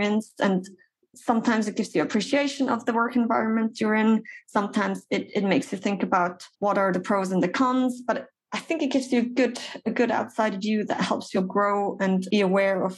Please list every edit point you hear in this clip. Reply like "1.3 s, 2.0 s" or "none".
6.5 s, 6.9 s, 11.3 s